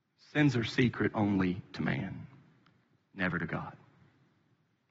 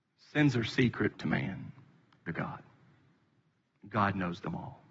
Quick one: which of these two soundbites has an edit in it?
second; 2 cuts; at 1.1 s, 2.3 s

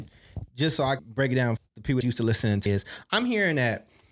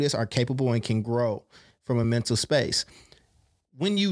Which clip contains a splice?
first; 4 cuts; at 1.0 s, 1.6 s, 2.0 s, 2.7 s

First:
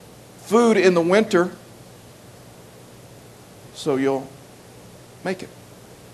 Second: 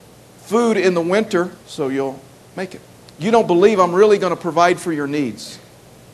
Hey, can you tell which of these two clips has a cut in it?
second; 3 cuts; at 1.6 s, 2.4 s, 3.0 s

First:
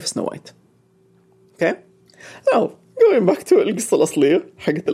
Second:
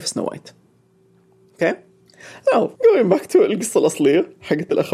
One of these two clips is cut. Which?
second; 1 cut; at 2.8 s

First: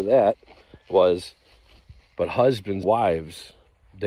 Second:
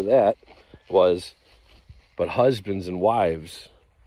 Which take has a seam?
first; 1 cut; at 2.8 s

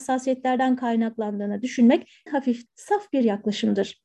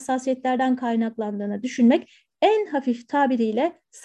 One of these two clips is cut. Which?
first; 2 cuts; at 2.3 s, 2.7 s

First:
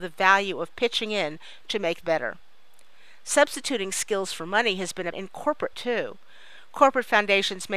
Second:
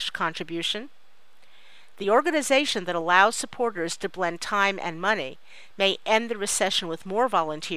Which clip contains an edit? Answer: first; 3 cuts; at 2.0 s, 5.1 s, 5.7 s

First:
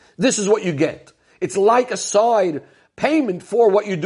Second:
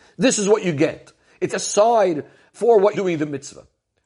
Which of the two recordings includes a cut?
second; 3 cuts; at 1.5 s, 2.5 s, 2.9 s

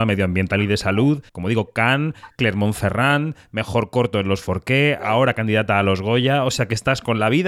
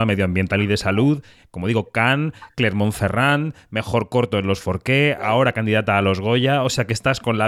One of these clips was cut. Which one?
first; 1 cut; at 1.3 s

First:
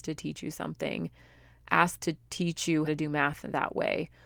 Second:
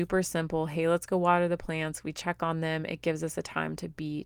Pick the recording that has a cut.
first; 2 cuts; at 2.0 s, 2.9 s

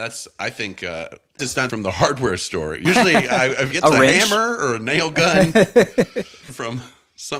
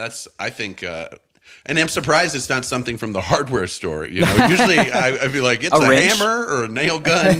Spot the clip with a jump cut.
first; 5 cuts; at 1.4 s, 1.7 s, 2.8 s, 3.7 s, 6.5 s

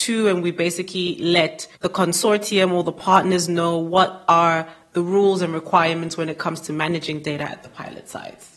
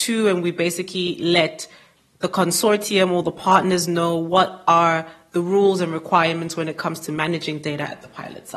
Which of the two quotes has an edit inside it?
first; 1 cut; at 1.8 s

